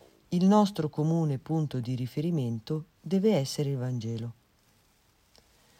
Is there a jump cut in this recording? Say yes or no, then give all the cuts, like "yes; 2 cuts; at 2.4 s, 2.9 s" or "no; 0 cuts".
yes; 1 cut; at 2.9 s